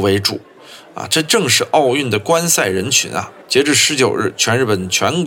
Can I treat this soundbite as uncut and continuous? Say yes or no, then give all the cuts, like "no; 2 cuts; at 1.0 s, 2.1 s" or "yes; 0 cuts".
no; 1 cut; at 3.4 s